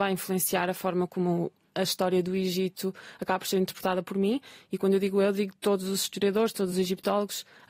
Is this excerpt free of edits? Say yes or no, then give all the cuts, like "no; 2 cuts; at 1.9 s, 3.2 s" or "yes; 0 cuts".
yes; 0 cuts